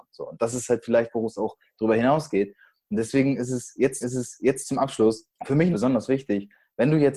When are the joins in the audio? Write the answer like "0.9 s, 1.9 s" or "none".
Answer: 4.0 s, 5.3 s, 5.7 s